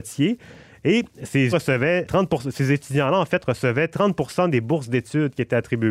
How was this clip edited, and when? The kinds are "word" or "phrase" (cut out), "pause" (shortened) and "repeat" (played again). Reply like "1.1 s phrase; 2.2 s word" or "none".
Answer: 1.5 s word; 2.1 s word